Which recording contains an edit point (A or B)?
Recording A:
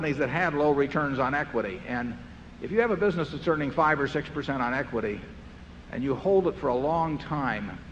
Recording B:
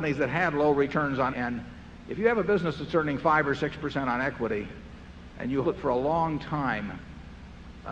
B